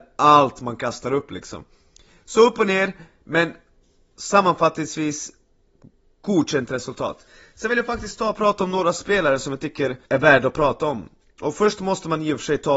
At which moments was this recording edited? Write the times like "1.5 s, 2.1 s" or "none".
10.0 s